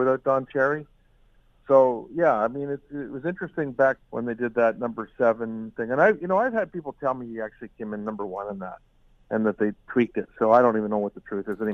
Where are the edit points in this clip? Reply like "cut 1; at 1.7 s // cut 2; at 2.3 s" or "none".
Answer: cut 1; at 4.0 s